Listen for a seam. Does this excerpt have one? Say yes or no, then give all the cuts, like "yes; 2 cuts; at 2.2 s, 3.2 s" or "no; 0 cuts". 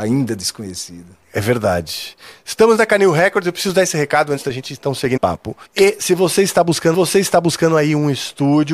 yes; 4 cuts; at 1.2 s, 5.2 s, 5.6 s, 6.9 s